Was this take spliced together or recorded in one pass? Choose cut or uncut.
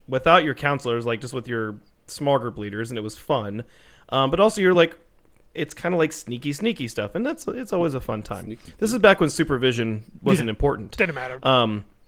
uncut